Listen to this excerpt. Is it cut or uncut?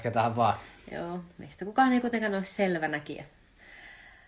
uncut